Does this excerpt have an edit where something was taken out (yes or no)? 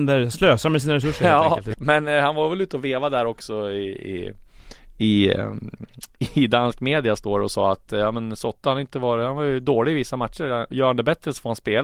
yes